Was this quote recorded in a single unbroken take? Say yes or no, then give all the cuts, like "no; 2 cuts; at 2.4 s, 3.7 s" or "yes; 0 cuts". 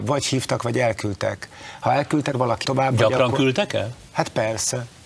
no; 2 cuts; at 2.3 s, 2.6 s